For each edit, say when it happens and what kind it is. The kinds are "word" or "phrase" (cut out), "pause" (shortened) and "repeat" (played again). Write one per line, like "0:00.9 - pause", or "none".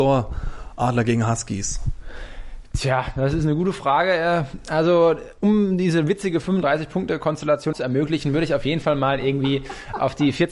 0:05.4 - pause
0:07.7 - word